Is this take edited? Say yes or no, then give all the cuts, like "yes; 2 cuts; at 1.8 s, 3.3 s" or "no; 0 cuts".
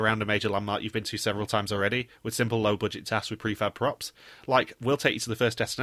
no; 0 cuts